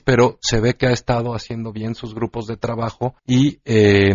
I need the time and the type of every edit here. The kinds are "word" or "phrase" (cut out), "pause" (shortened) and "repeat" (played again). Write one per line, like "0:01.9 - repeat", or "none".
0:03.2 - pause